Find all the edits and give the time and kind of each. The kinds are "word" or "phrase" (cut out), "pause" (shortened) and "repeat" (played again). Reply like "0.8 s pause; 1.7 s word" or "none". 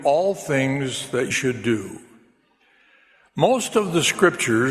1.3 s word